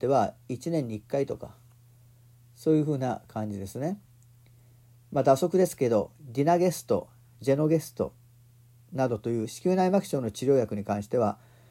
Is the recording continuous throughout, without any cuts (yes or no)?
yes